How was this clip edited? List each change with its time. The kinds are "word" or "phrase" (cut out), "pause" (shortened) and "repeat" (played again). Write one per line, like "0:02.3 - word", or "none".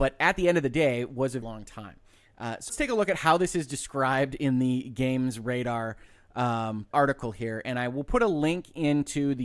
0:01.4 - word
0:02.7 - word
0:06.9 - word